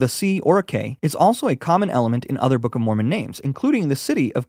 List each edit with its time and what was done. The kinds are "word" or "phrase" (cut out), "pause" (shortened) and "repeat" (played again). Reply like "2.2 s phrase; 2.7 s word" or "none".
1.0 s pause